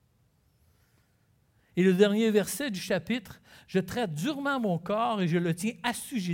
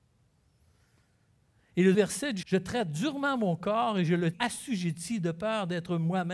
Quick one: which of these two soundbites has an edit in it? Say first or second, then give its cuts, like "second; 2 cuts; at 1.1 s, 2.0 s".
second; 3 cuts; at 1.9 s, 2.4 s, 4.3 s